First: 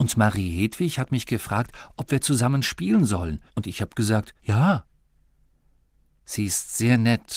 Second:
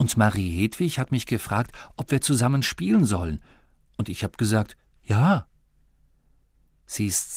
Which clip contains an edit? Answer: first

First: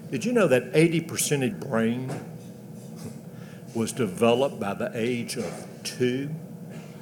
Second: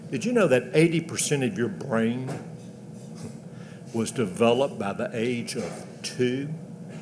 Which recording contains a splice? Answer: first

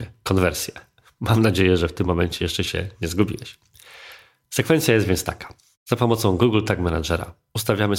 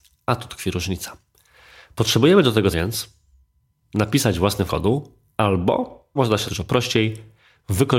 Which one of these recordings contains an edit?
second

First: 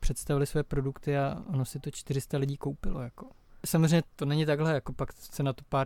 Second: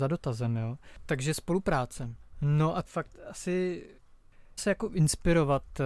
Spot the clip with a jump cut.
second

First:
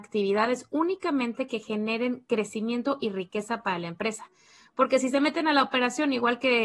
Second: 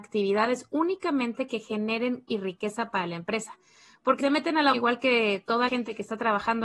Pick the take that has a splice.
second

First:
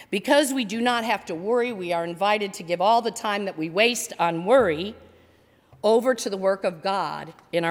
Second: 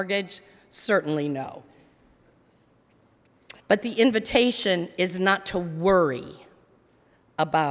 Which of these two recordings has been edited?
second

